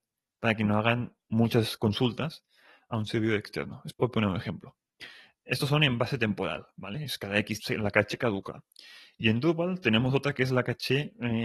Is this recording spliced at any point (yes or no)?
yes